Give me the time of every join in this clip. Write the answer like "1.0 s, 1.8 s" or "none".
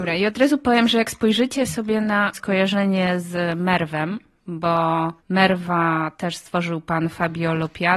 2.3 s, 5.2 s